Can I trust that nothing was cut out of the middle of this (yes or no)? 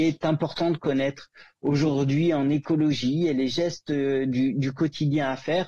yes